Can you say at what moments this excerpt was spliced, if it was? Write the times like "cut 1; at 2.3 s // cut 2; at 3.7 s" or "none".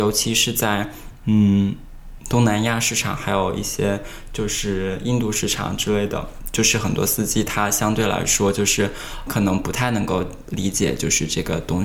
cut 1; at 9.3 s